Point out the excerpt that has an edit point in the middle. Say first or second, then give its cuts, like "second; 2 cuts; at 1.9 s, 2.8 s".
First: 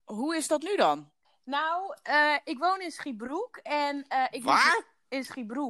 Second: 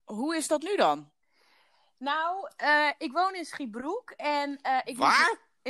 first; 1 cut; at 1.2 s